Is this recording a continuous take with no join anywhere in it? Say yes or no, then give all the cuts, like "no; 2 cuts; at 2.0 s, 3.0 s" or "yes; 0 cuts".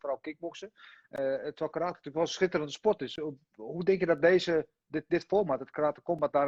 yes; 0 cuts